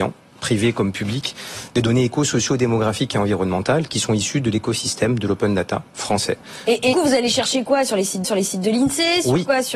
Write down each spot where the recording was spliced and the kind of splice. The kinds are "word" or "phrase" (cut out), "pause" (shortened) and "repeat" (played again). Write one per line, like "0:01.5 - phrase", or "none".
0:06.9 - phrase
0:08.2 - repeat

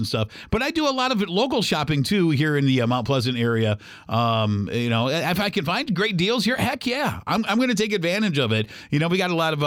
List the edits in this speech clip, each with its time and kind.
none

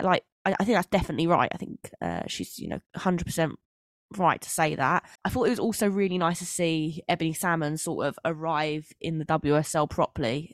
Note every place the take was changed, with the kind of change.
0:02.9 - pause
0:05.2 - pause

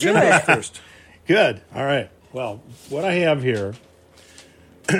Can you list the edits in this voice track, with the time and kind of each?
0:01.7 - pause

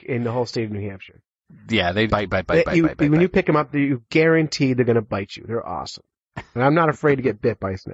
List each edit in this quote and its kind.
0:02.1 - word

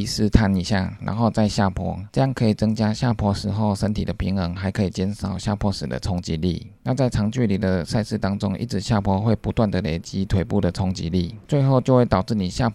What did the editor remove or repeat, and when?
none

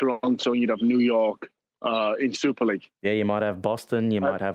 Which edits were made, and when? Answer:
none

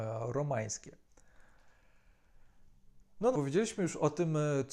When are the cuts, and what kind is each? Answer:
0:03.3 - word

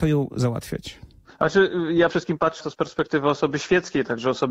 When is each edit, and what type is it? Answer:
0:02.1 - word
0:02.6 - word

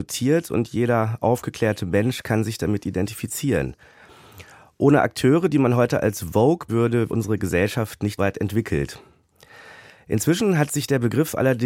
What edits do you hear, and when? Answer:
0:06.7 - word
0:07.1 - word
0:08.2 - word

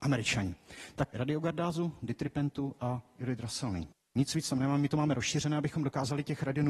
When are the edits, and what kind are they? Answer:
0:01.1 - phrase
0:03.9 - pause

